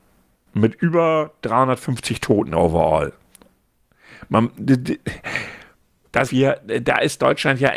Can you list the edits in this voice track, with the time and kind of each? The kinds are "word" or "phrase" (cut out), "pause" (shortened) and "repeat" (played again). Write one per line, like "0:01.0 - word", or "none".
0:06.2 - word